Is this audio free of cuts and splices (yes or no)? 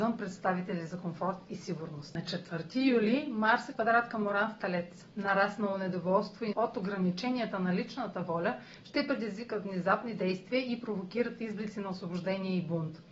no